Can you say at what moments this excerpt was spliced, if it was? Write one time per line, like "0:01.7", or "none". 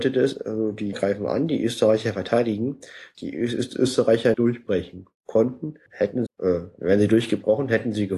0:00.9
0:03.1
0:04.3
0:05.9
0:06.3